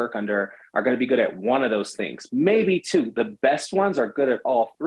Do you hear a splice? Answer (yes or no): no